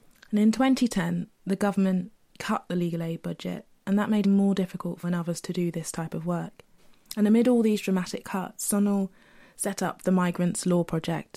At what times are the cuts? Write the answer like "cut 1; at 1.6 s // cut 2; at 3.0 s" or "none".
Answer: cut 1; at 4.2 s // cut 2; at 5.0 s